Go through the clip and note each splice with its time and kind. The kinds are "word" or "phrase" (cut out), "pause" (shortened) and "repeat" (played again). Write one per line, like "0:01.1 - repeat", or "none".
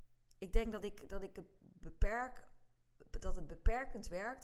none